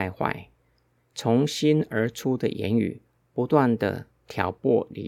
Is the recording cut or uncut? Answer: uncut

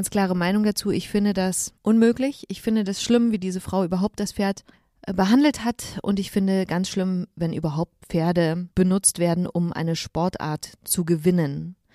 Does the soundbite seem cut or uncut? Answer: cut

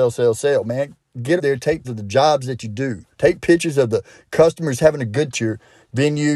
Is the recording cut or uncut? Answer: cut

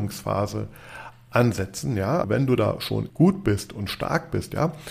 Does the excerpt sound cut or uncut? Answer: cut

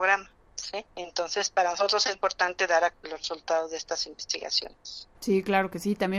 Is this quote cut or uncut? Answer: cut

